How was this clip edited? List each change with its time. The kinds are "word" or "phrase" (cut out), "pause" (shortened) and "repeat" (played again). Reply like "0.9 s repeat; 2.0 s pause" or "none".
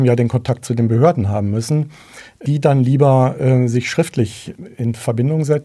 none